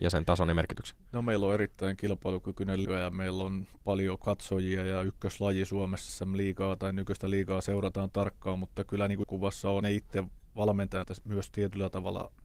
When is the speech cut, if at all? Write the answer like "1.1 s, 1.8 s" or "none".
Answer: 2.8 s, 6.1 s, 8.1 s, 9.2 s, 9.8 s, 11.0 s